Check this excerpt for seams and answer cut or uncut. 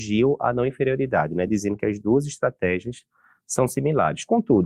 uncut